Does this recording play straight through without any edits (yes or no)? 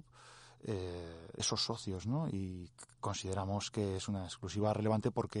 no